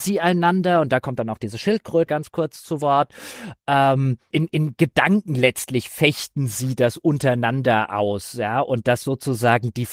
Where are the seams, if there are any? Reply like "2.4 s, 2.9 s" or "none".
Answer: 2.1 s, 4.3 s